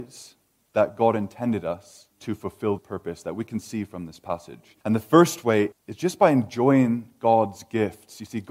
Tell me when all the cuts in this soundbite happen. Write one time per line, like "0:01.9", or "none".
0:02.1
0:02.8
0:04.8
0:05.7